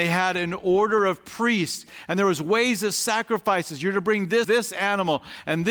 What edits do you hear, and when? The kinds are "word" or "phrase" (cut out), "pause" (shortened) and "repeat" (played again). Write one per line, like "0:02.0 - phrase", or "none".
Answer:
0:04.4 - word